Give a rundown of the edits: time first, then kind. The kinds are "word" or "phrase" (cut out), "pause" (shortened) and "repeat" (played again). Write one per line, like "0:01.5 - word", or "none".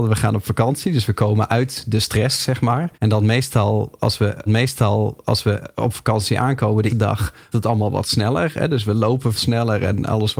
0:02.9 - pause
0:04.5 - repeat
0:06.9 - word
0:07.5 - word
0:09.4 - word